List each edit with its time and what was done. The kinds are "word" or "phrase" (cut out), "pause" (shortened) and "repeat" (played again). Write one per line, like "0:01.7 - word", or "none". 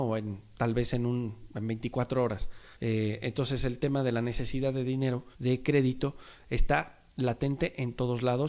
0:02.7 - pause
0:05.3 - pause

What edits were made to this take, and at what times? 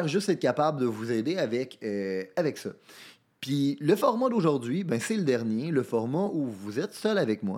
none

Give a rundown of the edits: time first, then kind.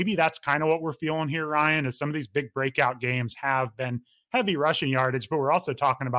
none

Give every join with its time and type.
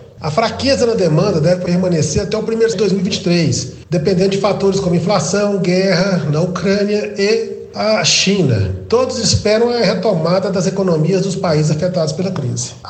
0:02.7 - word

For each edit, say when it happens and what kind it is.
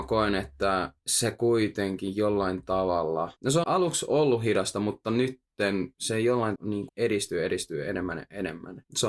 0:03.6 - word
0:06.6 - word
0:06.9 - word

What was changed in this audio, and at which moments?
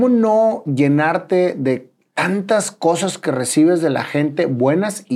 none

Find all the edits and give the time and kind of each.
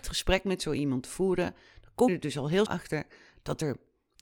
0:02.1 - word
0:02.7 - word

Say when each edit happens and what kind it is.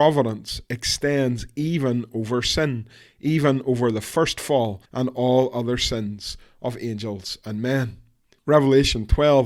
0:04.8 - pause

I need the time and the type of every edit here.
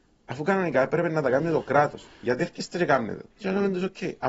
0:03.3 - pause

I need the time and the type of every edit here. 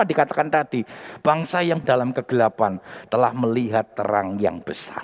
0:01.8 - word

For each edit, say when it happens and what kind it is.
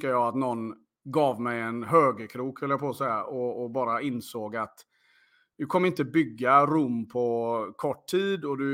none

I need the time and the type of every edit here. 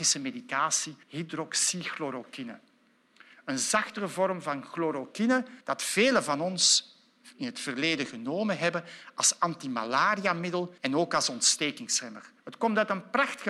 0:01.0 - pause
0:05.6 - pause
0:10.8 - pause
0:12.4 - pause

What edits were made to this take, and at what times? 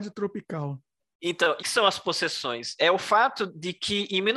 0:01.6 - phrase

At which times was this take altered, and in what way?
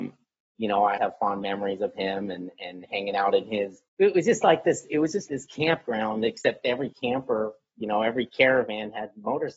0:01.0 - word
0:03.9 - pause
0:05.3 - word

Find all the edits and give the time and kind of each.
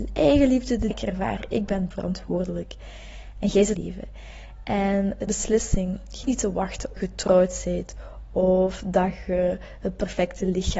0:00.9 - phrase
0:01.9 - word
0:03.8 - phrase
0:05.3 - phrase
0:06.2 - word
0:07.0 - phrase

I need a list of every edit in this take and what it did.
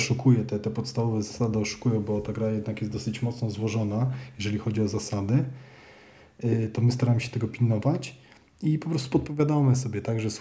none

